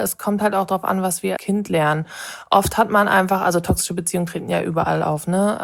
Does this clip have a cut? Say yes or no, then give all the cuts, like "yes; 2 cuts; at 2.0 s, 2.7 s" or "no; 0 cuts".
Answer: yes; 1 cut; at 1.4 s